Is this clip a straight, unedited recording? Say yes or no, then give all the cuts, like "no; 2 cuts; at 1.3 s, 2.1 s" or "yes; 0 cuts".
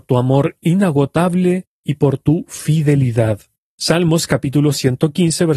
yes; 0 cuts